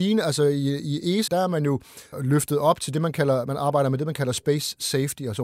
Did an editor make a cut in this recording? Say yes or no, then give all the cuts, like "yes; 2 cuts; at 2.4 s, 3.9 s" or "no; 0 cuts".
yes; 2 cuts; at 1.3 s, 2.1 s